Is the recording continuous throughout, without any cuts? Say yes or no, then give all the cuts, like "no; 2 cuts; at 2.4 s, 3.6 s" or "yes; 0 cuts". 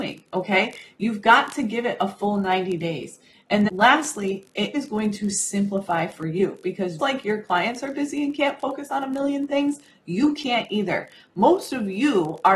no; 3 cuts; at 3.7 s, 4.7 s, 7.0 s